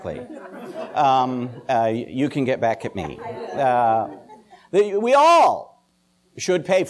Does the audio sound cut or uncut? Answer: uncut